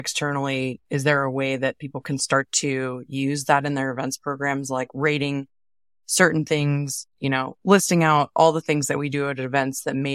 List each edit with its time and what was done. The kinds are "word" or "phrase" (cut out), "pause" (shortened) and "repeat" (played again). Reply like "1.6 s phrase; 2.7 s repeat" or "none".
none